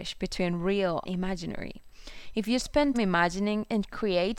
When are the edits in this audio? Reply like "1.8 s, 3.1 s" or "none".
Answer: 1.0 s, 2.9 s